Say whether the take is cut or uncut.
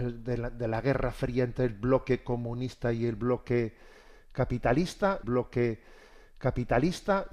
cut